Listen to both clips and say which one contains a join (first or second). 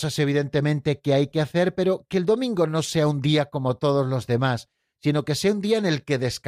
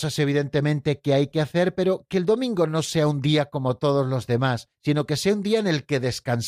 second